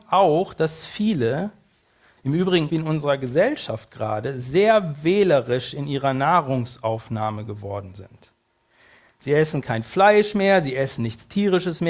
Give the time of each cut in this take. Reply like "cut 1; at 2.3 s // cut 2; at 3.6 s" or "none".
cut 1; at 2.7 s